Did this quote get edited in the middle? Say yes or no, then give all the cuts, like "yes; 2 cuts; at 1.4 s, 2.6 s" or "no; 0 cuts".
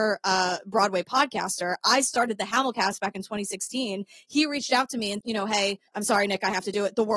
yes; 2 cuts; at 5.2 s, 5.9 s